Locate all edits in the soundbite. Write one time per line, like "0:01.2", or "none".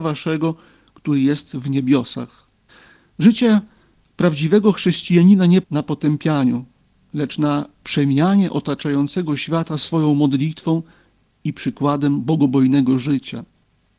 0:05.6